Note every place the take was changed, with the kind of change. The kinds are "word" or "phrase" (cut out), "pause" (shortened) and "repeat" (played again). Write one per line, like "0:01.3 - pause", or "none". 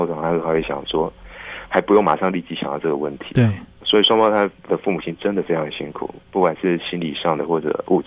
0:06.2 - pause